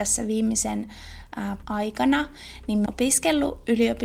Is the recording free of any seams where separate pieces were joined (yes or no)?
no